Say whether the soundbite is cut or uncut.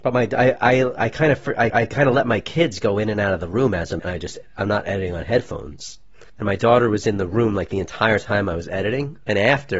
cut